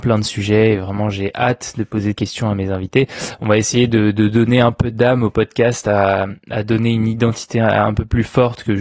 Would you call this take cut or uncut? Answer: cut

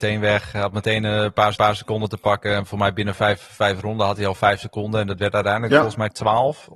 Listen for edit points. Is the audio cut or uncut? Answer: cut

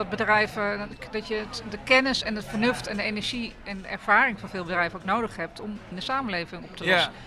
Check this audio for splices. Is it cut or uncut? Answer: cut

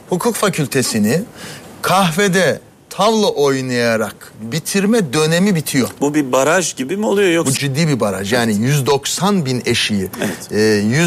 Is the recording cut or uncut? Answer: cut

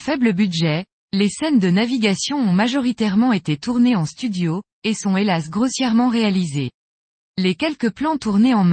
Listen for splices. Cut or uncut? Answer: uncut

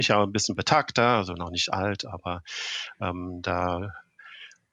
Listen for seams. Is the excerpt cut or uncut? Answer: uncut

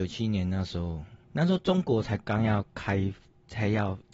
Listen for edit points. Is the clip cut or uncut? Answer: cut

